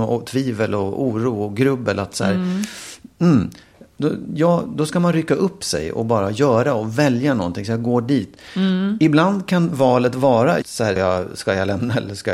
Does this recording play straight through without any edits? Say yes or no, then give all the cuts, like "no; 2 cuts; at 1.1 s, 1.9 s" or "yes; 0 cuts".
no; 2 cuts; at 10.6 s, 11.0 s